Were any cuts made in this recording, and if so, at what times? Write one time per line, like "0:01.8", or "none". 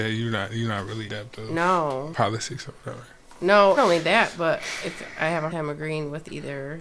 0:01.1
0:02.1
0:03.8
0:05.5